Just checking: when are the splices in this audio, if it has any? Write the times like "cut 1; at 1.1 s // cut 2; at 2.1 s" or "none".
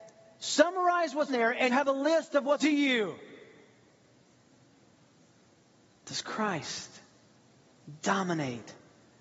cut 1; at 1.3 s // cut 2; at 1.7 s // cut 3; at 2.6 s